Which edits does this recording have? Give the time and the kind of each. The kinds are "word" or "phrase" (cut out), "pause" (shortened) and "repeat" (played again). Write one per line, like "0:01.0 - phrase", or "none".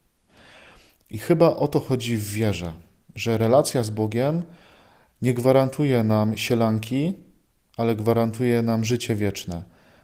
none